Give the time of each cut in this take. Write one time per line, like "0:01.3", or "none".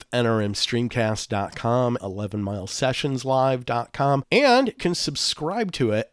0:02.0
0:04.8